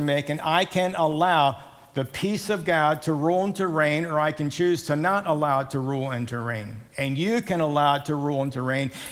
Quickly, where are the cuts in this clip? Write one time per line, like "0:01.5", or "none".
0:06.9